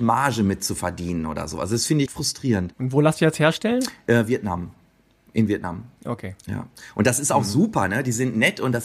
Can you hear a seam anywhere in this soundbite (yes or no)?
yes